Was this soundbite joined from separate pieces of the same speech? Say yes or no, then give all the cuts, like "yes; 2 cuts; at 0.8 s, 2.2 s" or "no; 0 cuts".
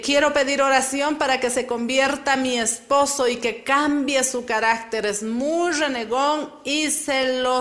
no; 0 cuts